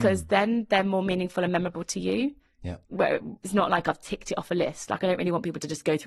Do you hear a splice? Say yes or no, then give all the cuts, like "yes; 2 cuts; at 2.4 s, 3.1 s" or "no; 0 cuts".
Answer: yes; 1 cut; at 2.8 s